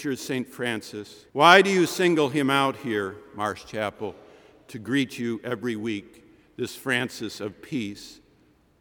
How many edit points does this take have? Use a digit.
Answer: 1